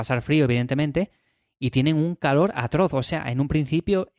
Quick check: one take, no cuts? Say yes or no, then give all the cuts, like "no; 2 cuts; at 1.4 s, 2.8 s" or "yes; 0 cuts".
yes; 0 cuts